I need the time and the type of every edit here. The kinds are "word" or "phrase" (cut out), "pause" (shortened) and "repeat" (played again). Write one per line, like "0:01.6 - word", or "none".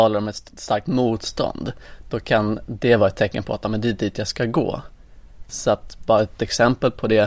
none